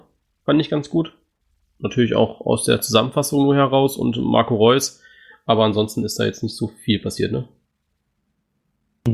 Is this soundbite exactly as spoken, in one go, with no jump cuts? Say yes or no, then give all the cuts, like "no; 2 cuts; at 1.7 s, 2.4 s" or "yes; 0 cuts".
yes; 0 cuts